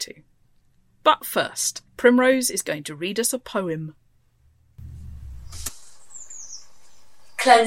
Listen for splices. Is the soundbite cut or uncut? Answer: cut